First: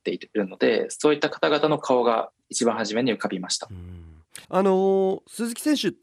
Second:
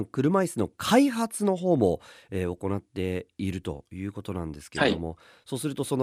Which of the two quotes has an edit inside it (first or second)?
first